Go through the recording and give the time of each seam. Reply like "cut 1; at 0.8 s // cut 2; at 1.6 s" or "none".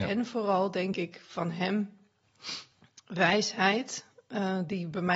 none